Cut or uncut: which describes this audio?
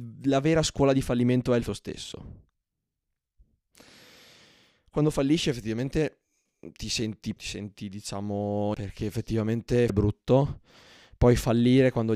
cut